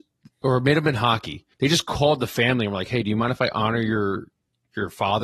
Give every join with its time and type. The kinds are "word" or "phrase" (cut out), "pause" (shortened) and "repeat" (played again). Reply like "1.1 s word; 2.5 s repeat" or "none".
1.5 s pause

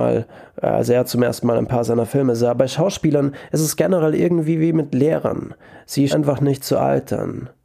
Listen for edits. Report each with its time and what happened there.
6.1 s word

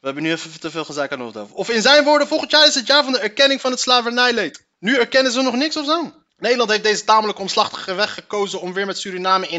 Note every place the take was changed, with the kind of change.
4.7 s pause; 6.3 s pause

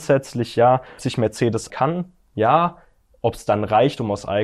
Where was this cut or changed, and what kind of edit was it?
1.0 s word; 1.7 s word

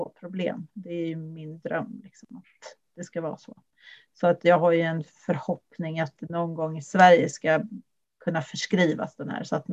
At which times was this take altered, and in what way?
none

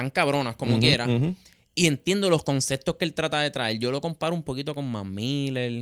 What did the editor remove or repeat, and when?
none

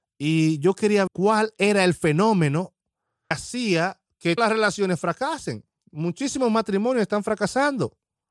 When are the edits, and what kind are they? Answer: 1.1 s word; 3.3 s word; 4.4 s word

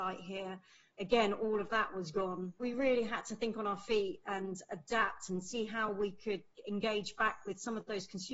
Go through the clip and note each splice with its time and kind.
none

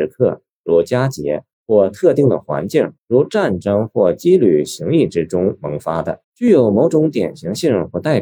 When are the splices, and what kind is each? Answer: 1.5 s pause; 3.0 s pause; 6.2 s pause

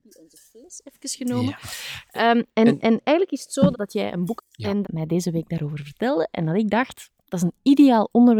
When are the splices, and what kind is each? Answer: 3.7 s word; 4.4 s phrase; 4.8 s phrase

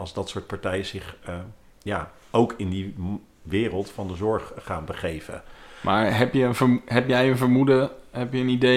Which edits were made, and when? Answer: 1.7 s pause

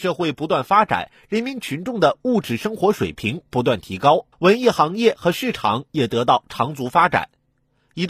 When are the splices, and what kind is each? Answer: 4.3 s pause

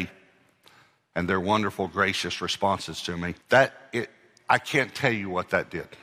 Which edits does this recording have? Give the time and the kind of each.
3.4 s pause

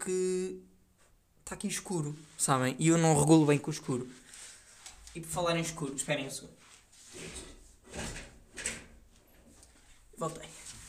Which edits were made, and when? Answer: none

